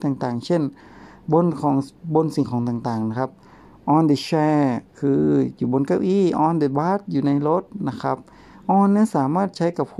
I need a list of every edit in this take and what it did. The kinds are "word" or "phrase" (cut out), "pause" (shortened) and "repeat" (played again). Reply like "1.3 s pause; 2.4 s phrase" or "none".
4.9 s pause